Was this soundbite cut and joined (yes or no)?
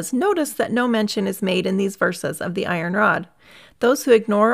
no